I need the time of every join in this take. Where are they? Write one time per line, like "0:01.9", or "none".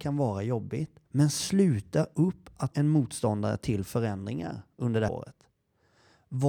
0:01.1
0:02.7
0:05.1